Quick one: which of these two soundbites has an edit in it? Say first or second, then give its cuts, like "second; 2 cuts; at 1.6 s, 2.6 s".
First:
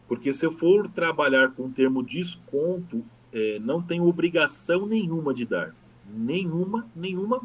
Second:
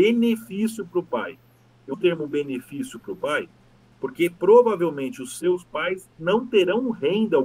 second; 2 cuts; at 1.9 s, 6.1 s